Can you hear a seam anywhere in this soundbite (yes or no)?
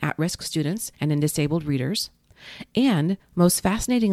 yes